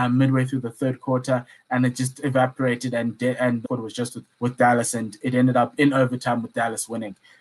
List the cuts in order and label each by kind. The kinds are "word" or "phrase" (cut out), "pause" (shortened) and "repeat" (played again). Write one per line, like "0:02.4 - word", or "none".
0:03.6 - phrase
0:04.3 - pause